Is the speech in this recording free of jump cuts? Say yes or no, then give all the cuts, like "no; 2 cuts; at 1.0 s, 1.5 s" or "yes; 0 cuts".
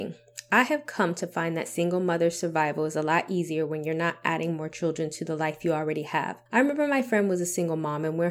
no; 1 cut; at 6.5 s